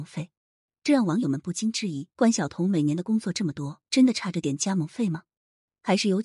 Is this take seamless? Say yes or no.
no